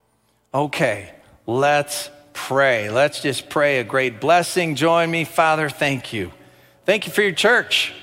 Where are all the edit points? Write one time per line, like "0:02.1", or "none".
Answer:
none